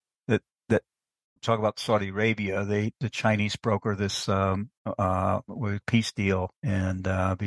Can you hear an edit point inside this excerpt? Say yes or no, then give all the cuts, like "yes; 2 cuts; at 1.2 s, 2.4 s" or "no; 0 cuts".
yes; 5 cuts; at 1.4 s, 2.9 s, 4.8 s, 5.8 s, 6.6 s